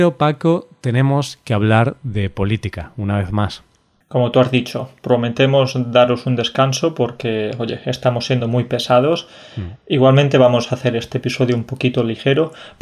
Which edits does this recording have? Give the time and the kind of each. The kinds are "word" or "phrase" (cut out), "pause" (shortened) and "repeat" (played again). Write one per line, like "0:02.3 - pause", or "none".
none